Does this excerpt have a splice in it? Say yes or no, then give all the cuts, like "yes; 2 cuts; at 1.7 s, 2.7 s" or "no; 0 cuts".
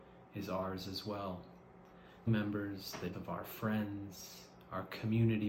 yes; 2 cuts; at 2.3 s, 3.1 s